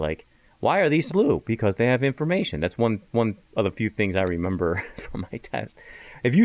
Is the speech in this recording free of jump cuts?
no; 2 cuts; at 1.1 s, 3.1 s

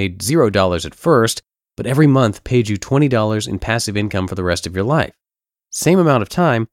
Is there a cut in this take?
no; 0 cuts

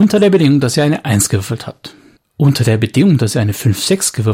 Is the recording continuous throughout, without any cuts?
no; 1 cut; at 2.2 s

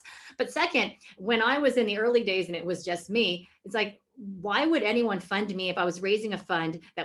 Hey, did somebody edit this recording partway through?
no; 0 cuts

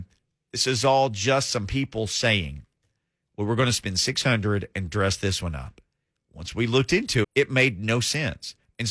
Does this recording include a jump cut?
yes; 1 cut; at 7.2 s

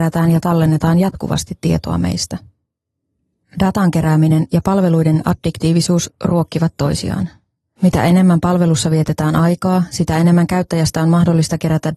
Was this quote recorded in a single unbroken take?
yes; 0 cuts

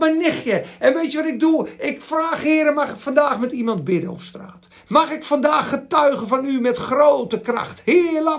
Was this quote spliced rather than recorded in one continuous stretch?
no; 0 cuts

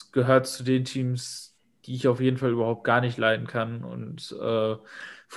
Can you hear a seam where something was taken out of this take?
no; 0 cuts

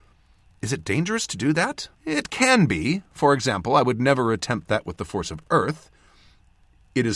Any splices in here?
yes; 1 cut; at 1.9 s

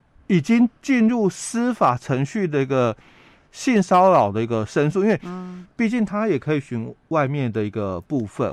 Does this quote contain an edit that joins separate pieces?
no; 0 cuts

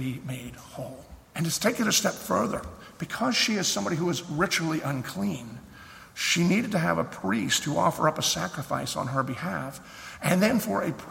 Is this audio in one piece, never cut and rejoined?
no; 1 cut; at 1.2 s

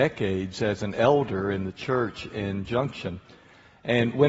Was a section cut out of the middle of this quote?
no; 0 cuts

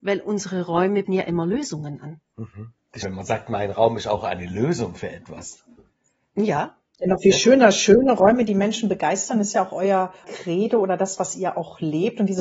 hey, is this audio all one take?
no; 3 cuts; at 1.0 s, 3.0 s, 10.2 s

